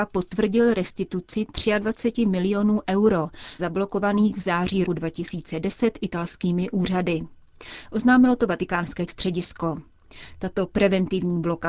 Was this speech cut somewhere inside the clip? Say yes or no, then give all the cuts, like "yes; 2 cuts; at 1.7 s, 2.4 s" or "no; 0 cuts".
yes; 3 cuts; at 3.6 s, 4.8 s, 9.1 s